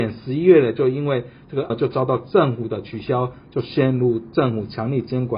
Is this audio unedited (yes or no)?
no